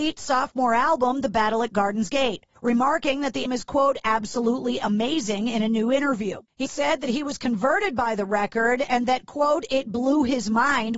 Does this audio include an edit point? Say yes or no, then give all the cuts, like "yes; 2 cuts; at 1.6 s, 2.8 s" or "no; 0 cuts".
yes; 3 cuts; at 2.6 s, 3.5 s, 6.7 s